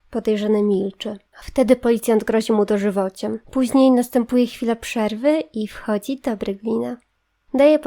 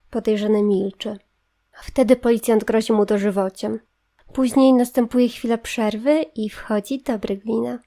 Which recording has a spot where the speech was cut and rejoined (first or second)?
first